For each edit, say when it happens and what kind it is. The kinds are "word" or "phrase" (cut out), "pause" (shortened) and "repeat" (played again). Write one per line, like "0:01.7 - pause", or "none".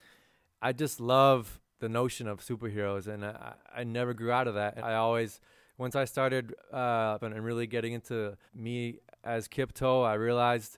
0:01.7 - pause
0:03.6 - pause
0:04.8 - word
0:07.2 - phrase
0:08.5 - pause